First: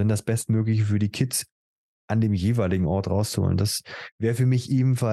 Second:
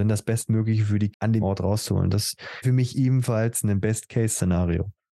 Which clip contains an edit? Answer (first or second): second